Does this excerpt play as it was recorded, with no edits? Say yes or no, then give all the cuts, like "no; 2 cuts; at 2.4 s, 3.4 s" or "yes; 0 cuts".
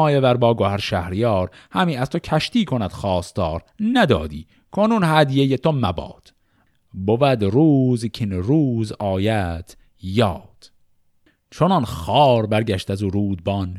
yes; 0 cuts